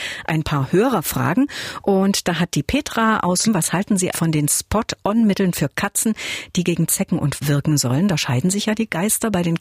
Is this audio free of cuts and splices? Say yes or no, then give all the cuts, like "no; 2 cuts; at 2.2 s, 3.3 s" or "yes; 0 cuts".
no; 3 cuts; at 3.5 s, 4.1 s, 7.4 s